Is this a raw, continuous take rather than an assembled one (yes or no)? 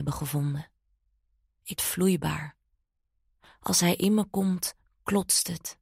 no